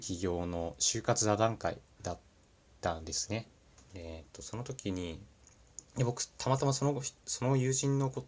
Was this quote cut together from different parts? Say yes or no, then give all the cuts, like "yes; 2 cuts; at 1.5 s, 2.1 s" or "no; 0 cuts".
yes; 3 cuts; at 1.9 s, 3.8 s, 5.9 s